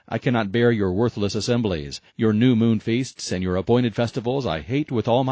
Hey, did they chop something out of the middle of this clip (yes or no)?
yes